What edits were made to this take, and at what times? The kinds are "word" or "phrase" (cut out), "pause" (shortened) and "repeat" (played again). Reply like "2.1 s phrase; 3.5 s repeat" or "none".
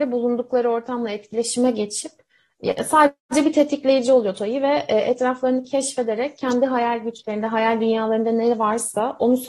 none